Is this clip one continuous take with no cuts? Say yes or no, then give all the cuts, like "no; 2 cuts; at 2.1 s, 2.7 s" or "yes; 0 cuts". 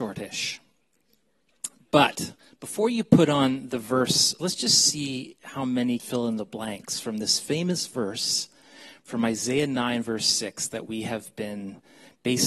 no; 2 cuts; at 4.4 s, 6.0 s